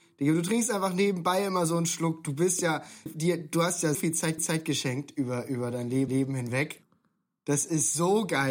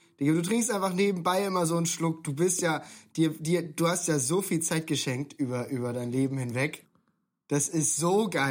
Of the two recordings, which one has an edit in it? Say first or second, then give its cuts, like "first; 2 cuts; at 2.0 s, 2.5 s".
first; 4 cuts; at 3.1 s, 3.9 s, 4.4 s, 6.1 s